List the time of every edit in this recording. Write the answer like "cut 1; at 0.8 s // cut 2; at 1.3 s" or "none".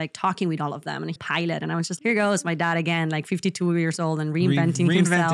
cut 1; at 1.2 s // cut 2; at 2.0 s